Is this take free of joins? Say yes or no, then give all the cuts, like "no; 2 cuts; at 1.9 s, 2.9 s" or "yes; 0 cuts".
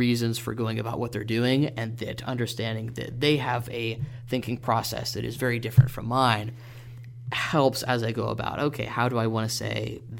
yes; 0 cuts